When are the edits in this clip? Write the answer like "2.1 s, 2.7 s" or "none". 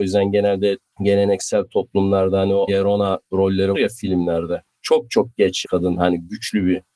2.7 s, 3.7 s, 5.6 s